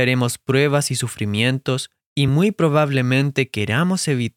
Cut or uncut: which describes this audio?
uncut